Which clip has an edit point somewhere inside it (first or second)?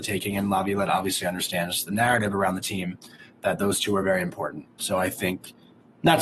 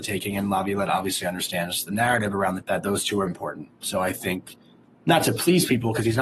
second